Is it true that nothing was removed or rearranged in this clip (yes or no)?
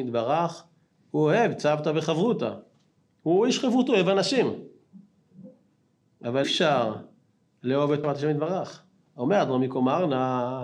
no